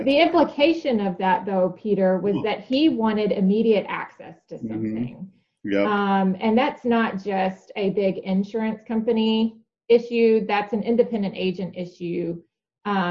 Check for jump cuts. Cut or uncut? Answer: uncut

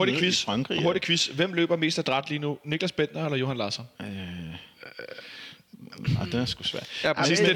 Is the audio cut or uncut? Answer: cut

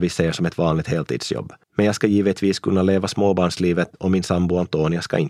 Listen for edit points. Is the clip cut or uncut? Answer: cut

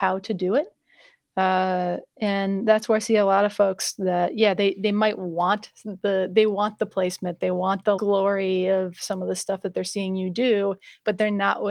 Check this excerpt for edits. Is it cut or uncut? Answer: cut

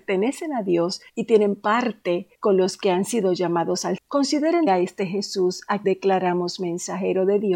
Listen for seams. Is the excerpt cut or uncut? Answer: cut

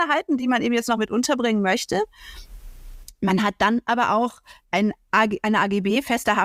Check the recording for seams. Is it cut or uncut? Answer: uncut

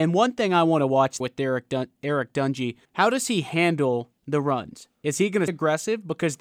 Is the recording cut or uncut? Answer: cut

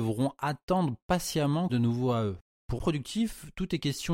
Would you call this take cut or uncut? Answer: cut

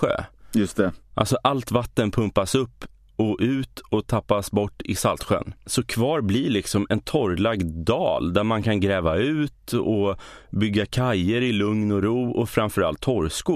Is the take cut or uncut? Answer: uncut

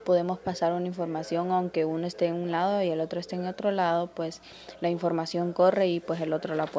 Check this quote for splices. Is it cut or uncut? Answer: uncut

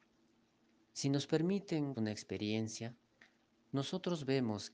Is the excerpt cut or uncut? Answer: cut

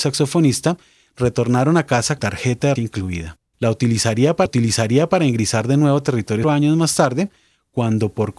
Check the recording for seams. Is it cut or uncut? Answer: cut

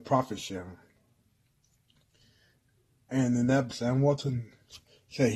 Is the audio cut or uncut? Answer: cut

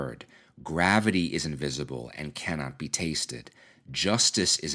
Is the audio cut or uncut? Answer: uncut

